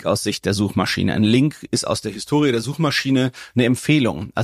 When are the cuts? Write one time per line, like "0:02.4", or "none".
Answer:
none